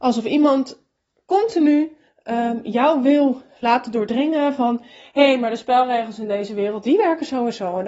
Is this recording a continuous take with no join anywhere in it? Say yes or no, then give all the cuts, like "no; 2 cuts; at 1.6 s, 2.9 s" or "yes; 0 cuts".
yes; 0 cuts